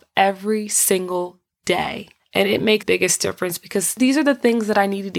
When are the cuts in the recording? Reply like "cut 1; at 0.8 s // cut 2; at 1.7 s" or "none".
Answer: cut 1; at 2.8 s